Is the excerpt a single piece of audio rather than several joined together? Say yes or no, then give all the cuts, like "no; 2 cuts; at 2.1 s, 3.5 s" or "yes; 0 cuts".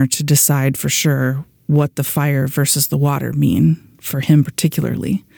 yes; 0 cuts